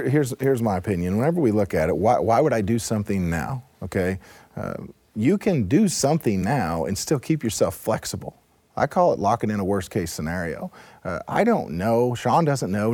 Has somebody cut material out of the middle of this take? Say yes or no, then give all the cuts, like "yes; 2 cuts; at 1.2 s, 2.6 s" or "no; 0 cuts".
no; 0 cuts